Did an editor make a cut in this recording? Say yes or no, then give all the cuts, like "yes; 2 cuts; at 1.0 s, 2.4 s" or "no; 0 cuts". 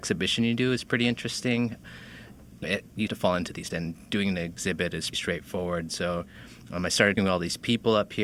yes; 5 cuts; at 2.6 s, 3.1 s, 3.7 s, 5.1 s, 7.2 s